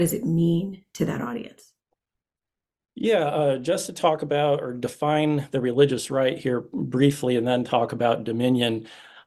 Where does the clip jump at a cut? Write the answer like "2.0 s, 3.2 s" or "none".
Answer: none

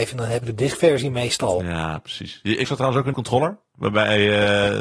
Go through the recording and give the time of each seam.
2.6 s, 3.1 s

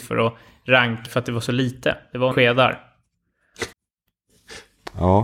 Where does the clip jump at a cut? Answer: 1.1 s, 2.3 s, 3.7 s

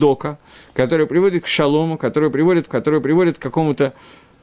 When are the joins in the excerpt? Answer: 2.7 s

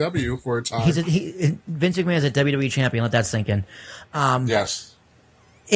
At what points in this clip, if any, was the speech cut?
none

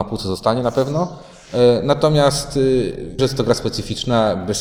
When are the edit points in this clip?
3.2 s

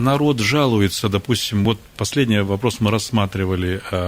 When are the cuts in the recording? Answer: none

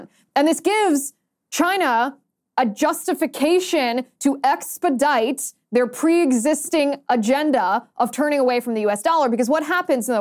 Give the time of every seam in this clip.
none

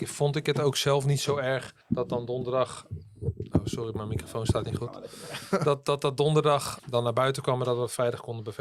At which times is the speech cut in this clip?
1.8 s, 6.8 s

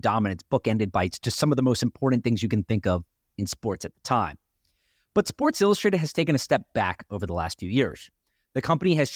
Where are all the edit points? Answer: none

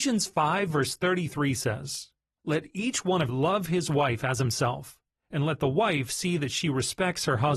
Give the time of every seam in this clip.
3.3 s

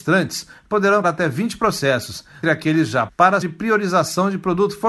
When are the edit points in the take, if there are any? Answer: 1.0 s, 2.4 s, 3.1 s, 3.4 s

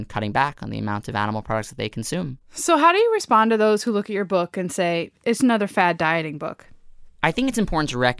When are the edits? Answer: 2.4 s, 5.4 s

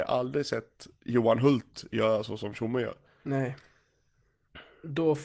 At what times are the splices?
none

